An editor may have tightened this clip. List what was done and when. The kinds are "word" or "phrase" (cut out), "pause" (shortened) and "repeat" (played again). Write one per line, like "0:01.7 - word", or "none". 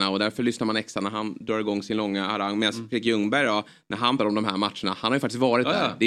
0:04.2 - word